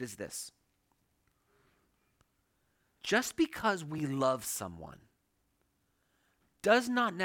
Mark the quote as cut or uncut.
uncut